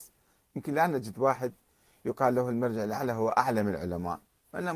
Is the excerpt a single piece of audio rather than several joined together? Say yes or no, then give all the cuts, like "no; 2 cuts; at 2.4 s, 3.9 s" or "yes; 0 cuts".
yes; 0 cuts